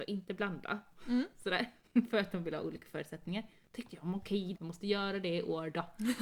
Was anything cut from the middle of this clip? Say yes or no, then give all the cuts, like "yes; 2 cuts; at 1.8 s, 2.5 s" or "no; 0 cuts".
yes; 1 cut; at 4.5 s